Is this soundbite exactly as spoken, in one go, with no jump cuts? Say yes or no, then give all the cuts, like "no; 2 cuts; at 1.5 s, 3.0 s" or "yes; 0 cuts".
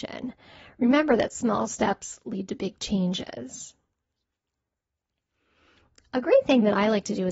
yes; 0 cuts